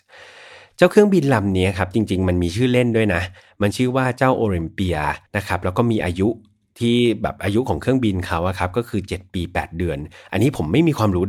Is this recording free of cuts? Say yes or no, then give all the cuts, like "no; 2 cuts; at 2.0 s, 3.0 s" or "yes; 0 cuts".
no; 1 cut; at 5.3 s